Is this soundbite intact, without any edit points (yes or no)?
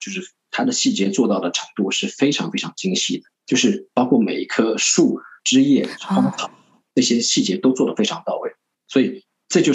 no